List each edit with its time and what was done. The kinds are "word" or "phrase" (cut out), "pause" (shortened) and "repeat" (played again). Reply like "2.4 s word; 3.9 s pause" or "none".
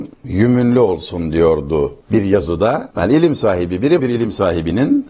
4.0 s word